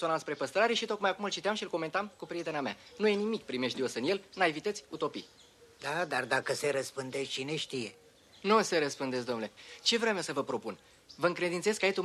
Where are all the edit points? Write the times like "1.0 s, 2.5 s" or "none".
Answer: none